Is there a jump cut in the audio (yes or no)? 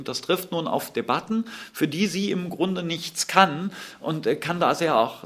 no